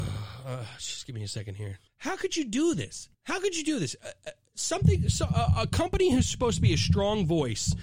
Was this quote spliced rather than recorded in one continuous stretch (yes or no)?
yes